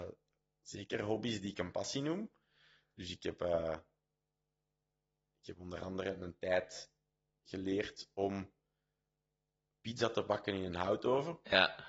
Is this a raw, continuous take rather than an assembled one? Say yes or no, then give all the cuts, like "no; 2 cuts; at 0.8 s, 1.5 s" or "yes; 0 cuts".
yes; 0 cuts